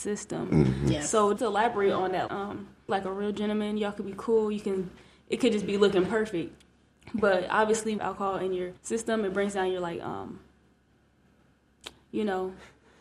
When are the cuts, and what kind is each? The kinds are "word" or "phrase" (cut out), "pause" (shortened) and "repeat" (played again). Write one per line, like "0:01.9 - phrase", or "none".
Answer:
0:01.4 - word
0:02.3 - word
0:02.9 - phrase
0:08.0 - phrase
0:08.8 - pause